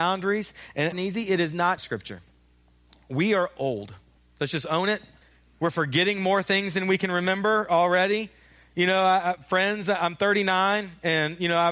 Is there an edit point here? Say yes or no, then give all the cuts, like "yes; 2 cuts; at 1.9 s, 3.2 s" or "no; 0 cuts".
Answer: yes; 4 cuts; at 0.9 s, 1.8 s, 4.2 s, 5.2 s